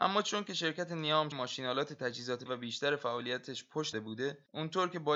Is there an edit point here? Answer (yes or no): yes